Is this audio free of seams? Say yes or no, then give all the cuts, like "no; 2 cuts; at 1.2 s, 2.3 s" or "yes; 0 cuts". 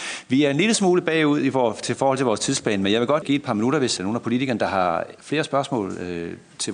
no; 3 cuts; at 3.2 s, 4.0 s, 5.2 s